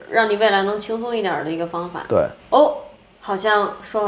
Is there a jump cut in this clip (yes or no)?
no